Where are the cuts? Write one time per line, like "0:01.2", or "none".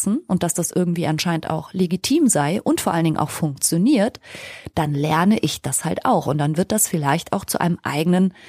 none